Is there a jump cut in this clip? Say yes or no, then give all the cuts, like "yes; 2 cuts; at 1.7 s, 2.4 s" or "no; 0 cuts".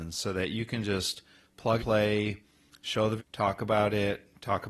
yes; 2 cuts; at 1.8 s, 3.2 s